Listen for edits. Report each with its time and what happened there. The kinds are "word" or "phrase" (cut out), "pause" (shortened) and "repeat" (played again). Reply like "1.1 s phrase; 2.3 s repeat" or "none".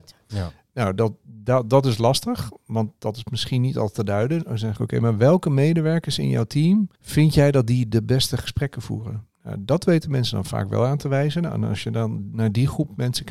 4.8 s phrase; 7.0 s pause